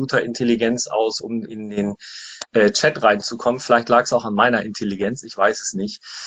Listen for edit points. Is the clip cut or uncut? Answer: uncut